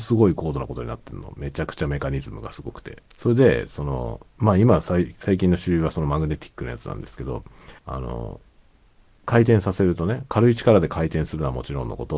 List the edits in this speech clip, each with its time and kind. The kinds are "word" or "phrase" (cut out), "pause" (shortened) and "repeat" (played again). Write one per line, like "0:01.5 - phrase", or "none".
0:03.1 - pause
0:04.3 - pause
0:07.8 - pause